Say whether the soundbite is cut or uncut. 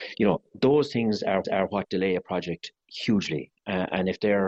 cut